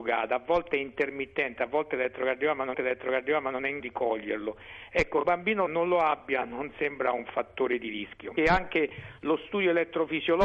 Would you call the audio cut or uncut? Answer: cut